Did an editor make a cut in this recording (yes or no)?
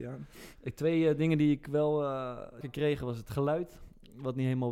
yes